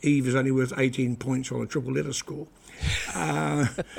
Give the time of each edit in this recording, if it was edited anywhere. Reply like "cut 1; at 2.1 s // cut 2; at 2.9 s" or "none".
none